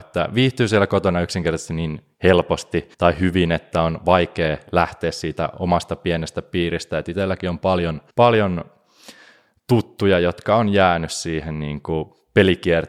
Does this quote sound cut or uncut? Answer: cut